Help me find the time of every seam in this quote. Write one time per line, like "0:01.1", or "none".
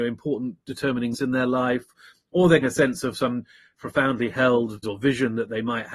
0:01.1
0:02.6
0:03.8
0:04.8